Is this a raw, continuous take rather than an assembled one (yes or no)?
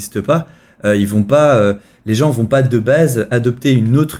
yes